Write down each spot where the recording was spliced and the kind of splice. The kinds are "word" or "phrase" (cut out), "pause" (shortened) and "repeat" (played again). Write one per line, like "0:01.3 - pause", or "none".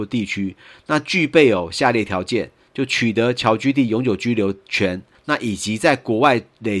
none